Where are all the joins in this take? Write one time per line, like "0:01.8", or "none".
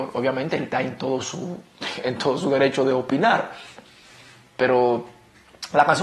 none